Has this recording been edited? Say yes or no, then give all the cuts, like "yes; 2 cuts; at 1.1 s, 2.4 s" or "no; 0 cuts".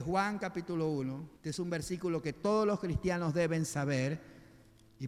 yes; 1 cut; at 1.4 s